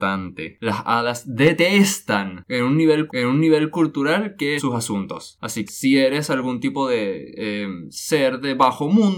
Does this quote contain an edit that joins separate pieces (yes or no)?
yes